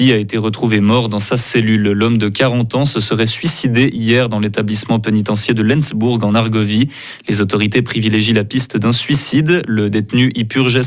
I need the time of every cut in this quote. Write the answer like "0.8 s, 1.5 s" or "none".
none